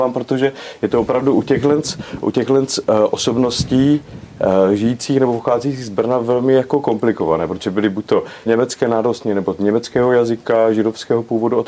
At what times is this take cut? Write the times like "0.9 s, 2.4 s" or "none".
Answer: 8.5 s

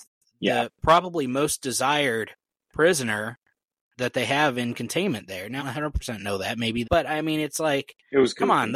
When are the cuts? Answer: 5.6 s, 6.8 s

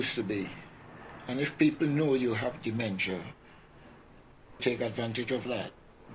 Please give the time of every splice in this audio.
4.6 s

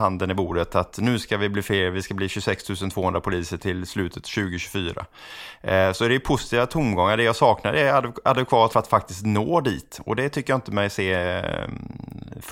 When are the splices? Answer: 3.6 s, 8.7 s

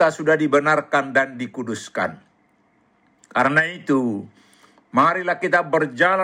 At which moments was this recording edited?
none

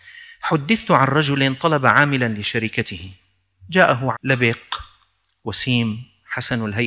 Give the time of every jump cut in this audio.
4.1 s

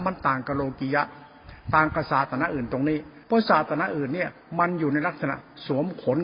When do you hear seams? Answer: 3.2 s

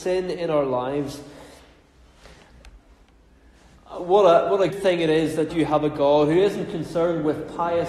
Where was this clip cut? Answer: 4.7 s, 5.5 s

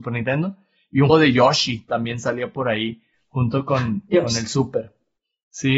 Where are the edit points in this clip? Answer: 1.1 s

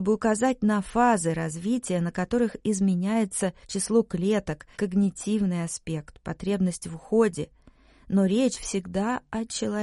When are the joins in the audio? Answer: 3.6 s, 4.7 s, 8.5 s

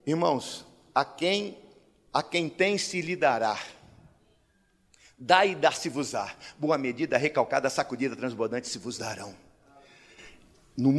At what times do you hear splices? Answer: none

